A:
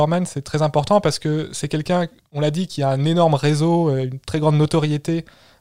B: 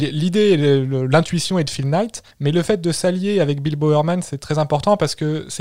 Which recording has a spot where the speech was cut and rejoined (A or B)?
B